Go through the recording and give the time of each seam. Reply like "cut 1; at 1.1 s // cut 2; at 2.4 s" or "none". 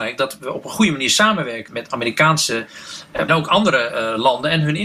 cut 1; at 1.7 s // cut 2; at 3.3 s